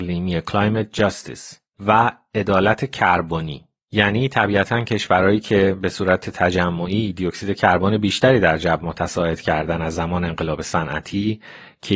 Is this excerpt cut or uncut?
uncut